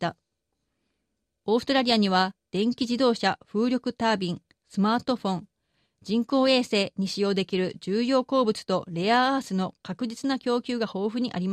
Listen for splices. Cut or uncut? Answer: uncut